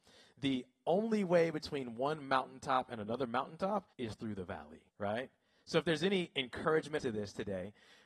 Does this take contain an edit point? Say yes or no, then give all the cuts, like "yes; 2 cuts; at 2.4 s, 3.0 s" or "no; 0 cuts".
yes; 3 cuts; at 3.9 s, 4.9 s, 7.0 s